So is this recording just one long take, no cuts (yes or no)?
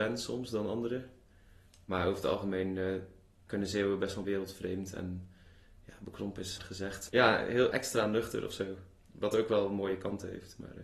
no